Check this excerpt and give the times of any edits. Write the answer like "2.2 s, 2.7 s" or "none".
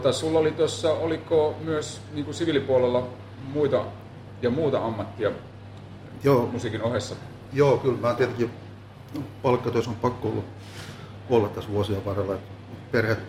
none